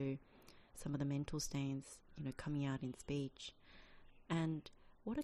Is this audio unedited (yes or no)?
yes